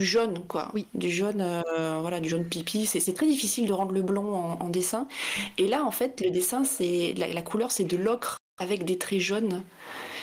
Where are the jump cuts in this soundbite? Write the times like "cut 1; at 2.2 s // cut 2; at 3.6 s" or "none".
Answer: none